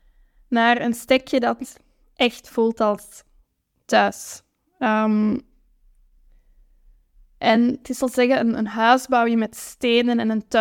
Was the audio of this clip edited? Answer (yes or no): no